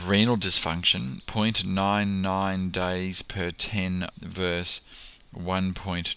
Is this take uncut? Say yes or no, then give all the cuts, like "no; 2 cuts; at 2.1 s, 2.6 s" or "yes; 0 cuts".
no; 2 cuts; at 1.2 s, 4.1 s